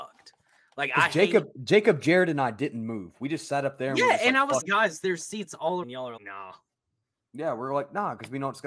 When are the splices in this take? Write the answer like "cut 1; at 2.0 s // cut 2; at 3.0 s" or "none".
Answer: cut 1; at 4.6 s // cut 2; at 5.8 s // cut 3; at 6.2 s